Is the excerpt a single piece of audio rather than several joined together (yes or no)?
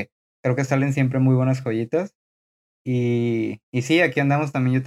yes